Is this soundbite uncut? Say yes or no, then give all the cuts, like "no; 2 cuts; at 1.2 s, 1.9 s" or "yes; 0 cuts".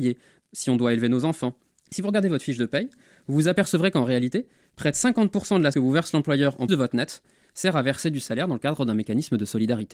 no; 2 cuts; at 5.7 s, 6.7 s